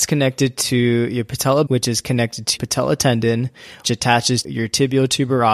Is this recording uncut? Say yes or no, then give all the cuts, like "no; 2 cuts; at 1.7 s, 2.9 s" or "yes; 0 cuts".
no; 4 cuts; at 1.7 s, 2.6 s, 3.8 s, 4.4 s